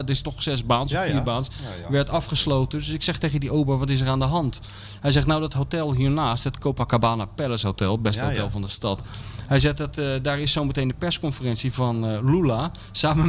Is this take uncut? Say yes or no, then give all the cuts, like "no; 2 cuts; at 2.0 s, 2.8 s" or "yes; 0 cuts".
yes; 0 cuts